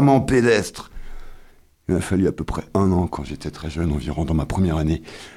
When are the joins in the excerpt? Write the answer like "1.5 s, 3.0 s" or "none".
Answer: none